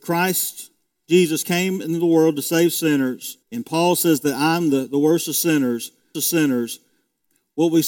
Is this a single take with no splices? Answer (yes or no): no